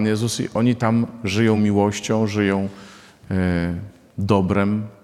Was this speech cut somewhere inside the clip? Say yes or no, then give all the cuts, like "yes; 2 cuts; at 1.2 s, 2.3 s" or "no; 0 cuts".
no; 0 cuts